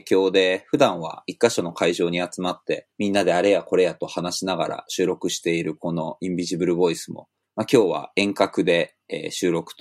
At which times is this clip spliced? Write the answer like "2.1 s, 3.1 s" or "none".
2.9 s